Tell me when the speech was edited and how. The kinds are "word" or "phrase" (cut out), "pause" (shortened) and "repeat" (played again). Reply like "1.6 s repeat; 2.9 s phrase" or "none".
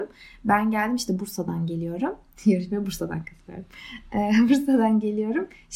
none